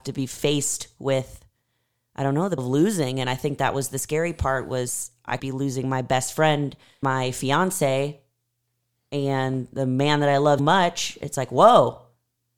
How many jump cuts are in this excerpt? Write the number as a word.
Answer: four